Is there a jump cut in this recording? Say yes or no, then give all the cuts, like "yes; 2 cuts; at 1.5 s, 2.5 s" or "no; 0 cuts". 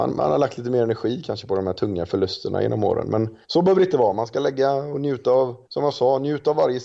yes; 2 cuts; at 3.4 s, 5.6 s